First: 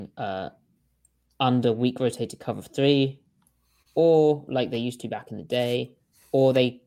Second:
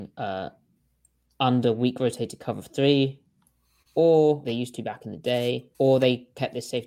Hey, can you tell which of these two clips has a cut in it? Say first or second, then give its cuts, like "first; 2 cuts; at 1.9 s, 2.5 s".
second; 2 cuts; at 4.4 s, 5.7 s